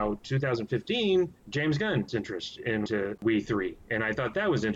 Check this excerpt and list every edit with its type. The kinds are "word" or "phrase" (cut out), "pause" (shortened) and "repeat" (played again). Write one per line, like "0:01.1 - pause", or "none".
0:01.4 - pause
0:02.1 - word
0:02.9 - word
0:03.2 - word